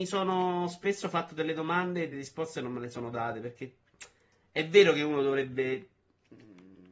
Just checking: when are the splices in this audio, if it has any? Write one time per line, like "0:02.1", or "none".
0:02.1